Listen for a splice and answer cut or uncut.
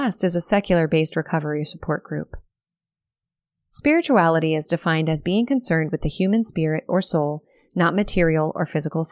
uncut